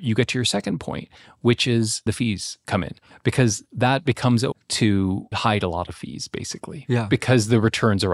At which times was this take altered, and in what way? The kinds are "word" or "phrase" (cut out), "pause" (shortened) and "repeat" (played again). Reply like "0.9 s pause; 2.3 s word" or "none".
2.1 s word; 4.5 s word; 5.3 s word